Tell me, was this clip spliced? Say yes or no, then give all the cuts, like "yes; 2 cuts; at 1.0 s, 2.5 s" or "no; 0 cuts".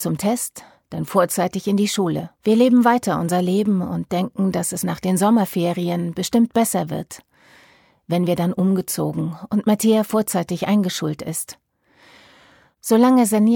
yes; 1 cut; at 2.4 s